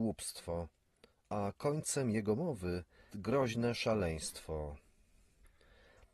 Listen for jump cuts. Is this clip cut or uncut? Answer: cut